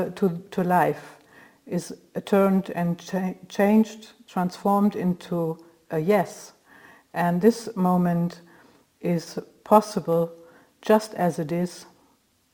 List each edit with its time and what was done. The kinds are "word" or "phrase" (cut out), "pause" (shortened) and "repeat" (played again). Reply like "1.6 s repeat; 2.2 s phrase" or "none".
none